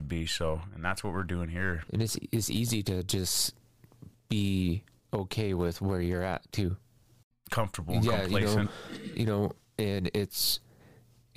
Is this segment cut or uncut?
uncut